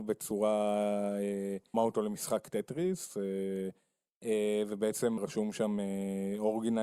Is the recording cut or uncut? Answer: cut